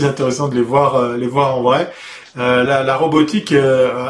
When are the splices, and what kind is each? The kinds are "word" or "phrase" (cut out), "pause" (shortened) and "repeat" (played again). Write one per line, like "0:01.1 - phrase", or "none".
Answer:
0:02.7 - word